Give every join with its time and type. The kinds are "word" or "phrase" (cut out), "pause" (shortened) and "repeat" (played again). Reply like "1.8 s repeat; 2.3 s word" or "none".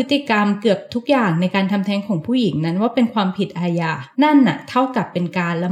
4.1 s pause

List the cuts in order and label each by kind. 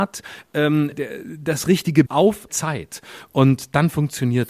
0.9 s word; 2.1 s word; 2.5 s word

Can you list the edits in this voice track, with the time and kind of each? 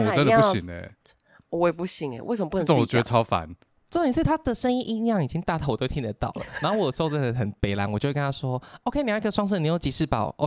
none

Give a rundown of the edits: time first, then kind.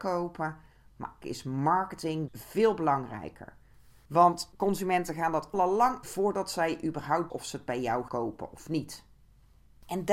1.2 s word; 2.3 s word; 5.5 s word; 6.0 s word; 7.3 s word; 8.1 s word

